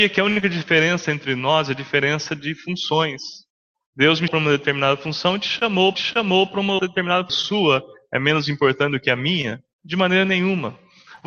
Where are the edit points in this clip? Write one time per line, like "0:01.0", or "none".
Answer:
0:03.7
0:04.3
0:05.9
0:06.8
0:07.3
0:09.7